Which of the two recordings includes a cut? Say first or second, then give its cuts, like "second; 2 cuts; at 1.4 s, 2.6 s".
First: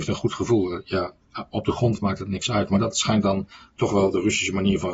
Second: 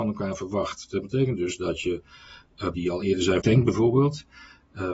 second; 2 cuts; at 2.7 s, 3.4 s